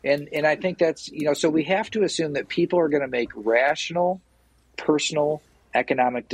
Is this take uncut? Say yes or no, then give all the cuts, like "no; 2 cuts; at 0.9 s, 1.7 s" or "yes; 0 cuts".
yes; 0 cuts